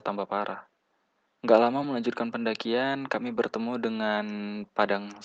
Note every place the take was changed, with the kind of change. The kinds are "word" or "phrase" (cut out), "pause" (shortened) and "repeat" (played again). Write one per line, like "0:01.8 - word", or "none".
none